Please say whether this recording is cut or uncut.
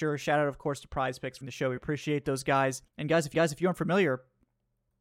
cut